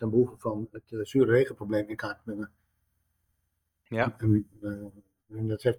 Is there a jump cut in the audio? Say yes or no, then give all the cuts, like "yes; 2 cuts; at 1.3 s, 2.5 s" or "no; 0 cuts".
no; 0 cuts